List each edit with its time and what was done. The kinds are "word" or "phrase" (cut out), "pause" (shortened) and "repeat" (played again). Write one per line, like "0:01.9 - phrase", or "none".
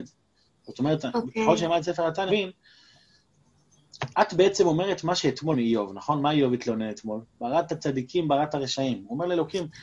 0:02.3 - word
0:04.1 - pause
0:05.5 - phrase